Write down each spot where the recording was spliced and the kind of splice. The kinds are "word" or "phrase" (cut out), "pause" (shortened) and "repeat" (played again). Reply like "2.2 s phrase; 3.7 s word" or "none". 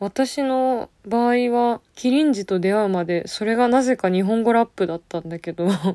1.9 s pause